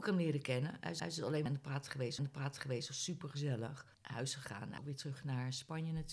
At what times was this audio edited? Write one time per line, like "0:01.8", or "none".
0:01.0
0:01.5
0:02.2
0:03.9
0:04.8